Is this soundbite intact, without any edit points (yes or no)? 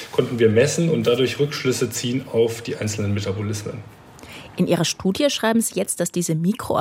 yes